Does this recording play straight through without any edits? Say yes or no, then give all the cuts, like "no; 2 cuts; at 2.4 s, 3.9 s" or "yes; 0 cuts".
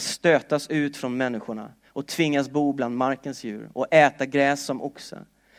yes; 0 cuts